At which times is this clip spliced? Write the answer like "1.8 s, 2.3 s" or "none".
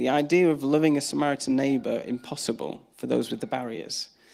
none